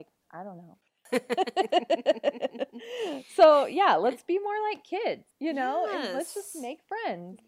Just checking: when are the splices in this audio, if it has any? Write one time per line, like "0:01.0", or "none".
0:05.3

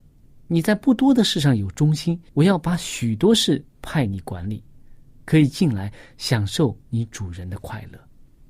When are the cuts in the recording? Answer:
0:02.3
0:03.7
0:06.8

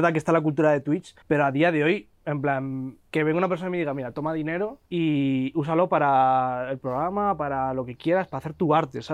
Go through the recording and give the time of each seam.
0:01.2
0:03.1
0:04.9

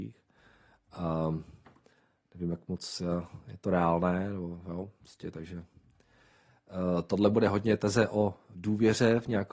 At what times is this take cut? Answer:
none

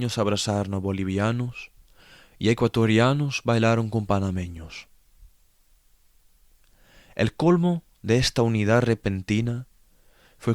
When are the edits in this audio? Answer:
none

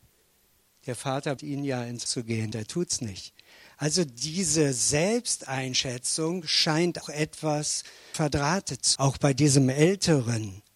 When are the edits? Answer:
0:01.4
0:02.1
0:02.5
0:07.0
0:08.1
0:09.0

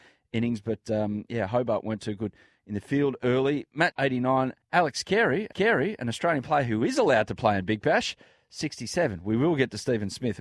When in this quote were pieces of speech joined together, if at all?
0:03.9
0:04.6
0:05.5

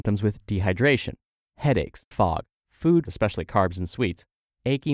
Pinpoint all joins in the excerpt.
0:02.1
0:03.1

